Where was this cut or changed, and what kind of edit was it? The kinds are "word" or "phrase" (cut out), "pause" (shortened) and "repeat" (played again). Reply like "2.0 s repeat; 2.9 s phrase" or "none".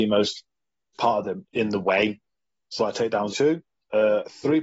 0.9 s word; 1.4 s word; 2.8 s word; 3.3 s word